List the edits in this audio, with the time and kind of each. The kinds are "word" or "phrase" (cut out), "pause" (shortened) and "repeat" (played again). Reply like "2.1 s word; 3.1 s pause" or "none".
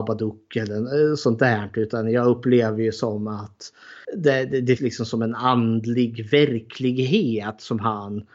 4.0 s pause; 4.8 s word